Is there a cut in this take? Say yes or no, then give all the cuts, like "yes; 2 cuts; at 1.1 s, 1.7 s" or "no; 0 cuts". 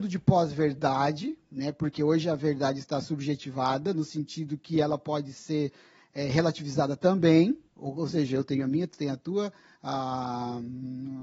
yes; 1 cut; at 7.7 s